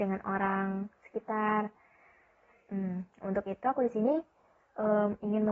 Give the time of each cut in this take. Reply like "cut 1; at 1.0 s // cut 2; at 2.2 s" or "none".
none

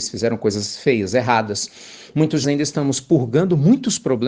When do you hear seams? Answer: cut 1; at 2.4 s

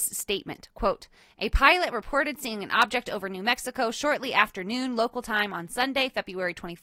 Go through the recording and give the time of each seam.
none

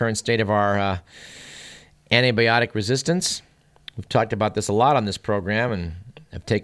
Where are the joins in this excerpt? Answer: none

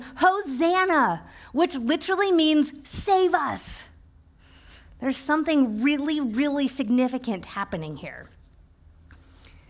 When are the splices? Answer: none

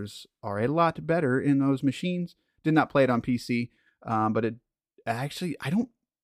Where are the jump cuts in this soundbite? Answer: none

